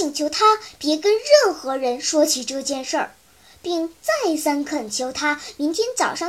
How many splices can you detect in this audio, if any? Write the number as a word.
zero